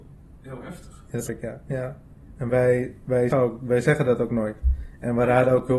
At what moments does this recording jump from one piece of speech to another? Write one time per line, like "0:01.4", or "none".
0:01.3
0:02.5
0:03.3